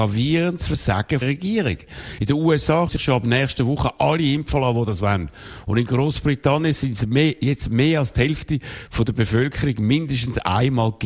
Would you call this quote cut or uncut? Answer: cut